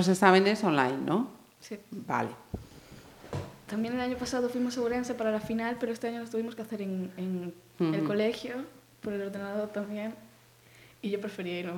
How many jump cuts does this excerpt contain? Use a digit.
0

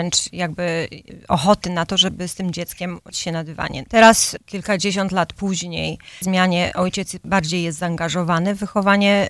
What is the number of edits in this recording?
2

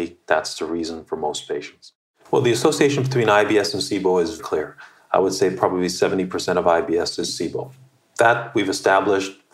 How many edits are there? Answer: 1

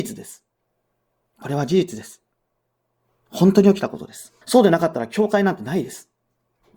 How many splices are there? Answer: 1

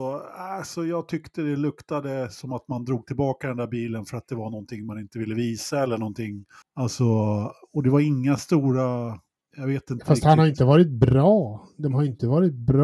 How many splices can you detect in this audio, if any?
2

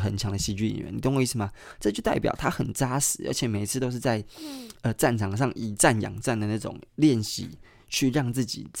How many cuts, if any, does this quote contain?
1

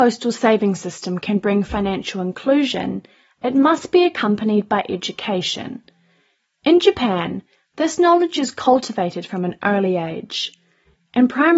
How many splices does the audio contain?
0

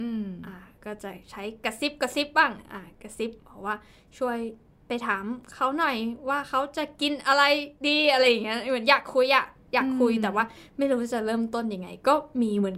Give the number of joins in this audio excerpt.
2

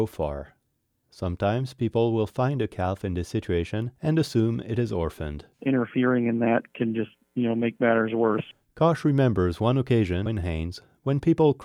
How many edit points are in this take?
3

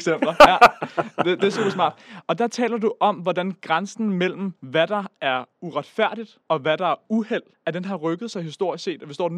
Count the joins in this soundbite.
3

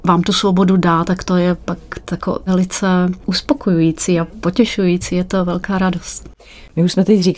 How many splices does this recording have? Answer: 0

